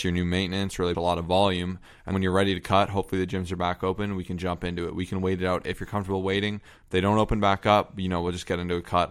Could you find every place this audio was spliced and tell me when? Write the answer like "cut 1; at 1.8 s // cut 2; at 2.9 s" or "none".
cut 1; at 0.9 s // cut 2; at 2.1 s

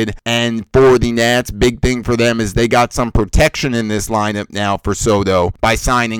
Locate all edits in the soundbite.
none

